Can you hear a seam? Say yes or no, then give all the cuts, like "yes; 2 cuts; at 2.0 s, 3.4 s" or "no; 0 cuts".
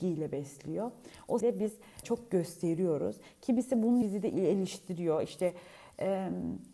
yes; 3 cuts; at 1.4 s, 2.0 s, 4.0 s